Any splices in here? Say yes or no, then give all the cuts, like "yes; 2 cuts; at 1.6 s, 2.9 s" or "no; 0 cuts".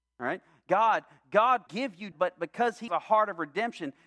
yes; 3 cuts; at 1.7 s, 2.1 s, 2.9 s